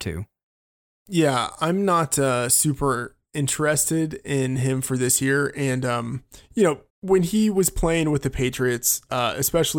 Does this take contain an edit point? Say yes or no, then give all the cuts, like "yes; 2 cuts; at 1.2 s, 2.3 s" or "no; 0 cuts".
yes; 1 cut; at 6.9 s